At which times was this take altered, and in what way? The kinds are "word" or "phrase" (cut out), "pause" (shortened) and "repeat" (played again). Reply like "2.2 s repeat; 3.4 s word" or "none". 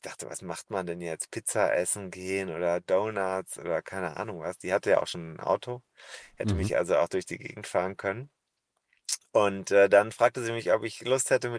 none